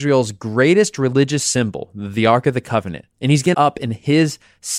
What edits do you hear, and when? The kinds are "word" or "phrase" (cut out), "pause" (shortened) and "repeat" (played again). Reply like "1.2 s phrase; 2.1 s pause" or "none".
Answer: 3.1 s pause; 3.5 s phrase

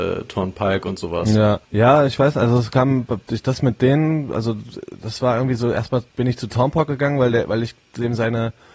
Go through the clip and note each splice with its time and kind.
1.6 s pause; 6.1 s pause

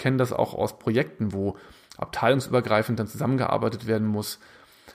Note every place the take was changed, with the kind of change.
none

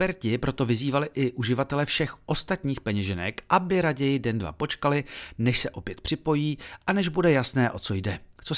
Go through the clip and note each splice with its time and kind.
none

